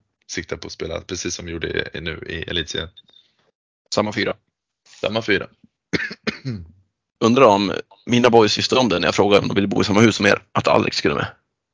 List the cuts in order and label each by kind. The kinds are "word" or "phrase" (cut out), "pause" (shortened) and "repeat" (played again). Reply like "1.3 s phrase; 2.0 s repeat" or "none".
none